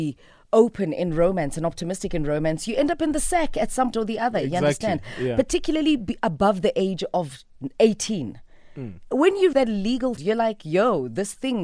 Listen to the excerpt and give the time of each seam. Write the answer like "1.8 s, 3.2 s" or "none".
3.9 s, 9.5 s, 10.2 s